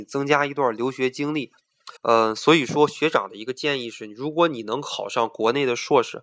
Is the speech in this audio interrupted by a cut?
yes; 1 cut; at 2.0 s

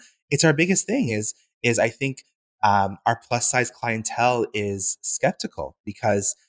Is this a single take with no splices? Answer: yes; 0 cuts

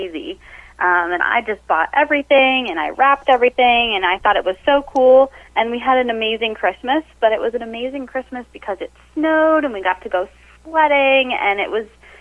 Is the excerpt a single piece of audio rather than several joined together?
no; 1 cut; at 5.5 s

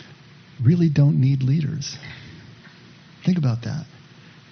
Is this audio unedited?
yes; 0 cuts

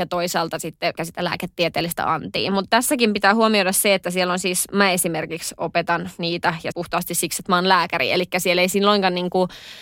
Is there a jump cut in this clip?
yes; 2 cuts; at 1.0 s, 6.7 s

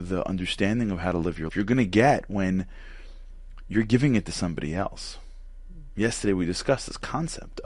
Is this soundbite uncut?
no; 1 cut; at 1.5 s

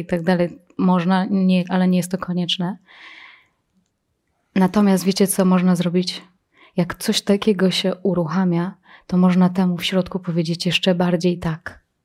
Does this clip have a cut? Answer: no; 0 cuts

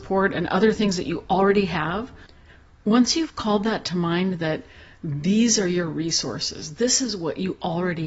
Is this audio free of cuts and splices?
yes; 0 cuts

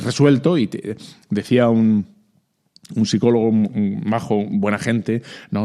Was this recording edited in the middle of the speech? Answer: no; 0 cuts

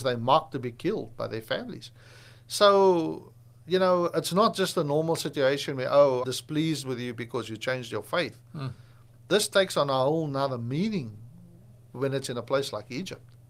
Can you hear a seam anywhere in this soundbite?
yes; 1 cut; at 6.2 s

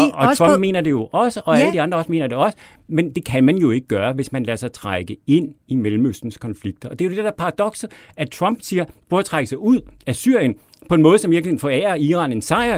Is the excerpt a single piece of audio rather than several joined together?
yes; 0 cuts

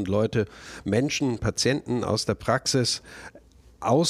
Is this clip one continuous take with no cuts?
yes; 0 cuts

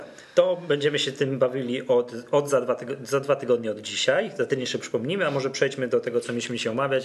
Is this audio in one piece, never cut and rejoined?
yes; 0 cuts

